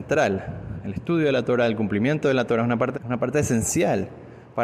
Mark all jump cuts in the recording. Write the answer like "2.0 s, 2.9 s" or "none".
2.9 s